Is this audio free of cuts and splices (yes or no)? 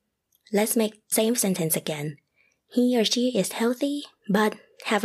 no